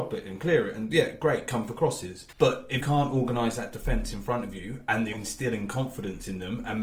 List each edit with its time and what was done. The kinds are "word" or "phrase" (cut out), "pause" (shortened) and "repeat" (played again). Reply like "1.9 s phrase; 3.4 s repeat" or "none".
2.3 s pause; 2.8 s word; 5.1 s word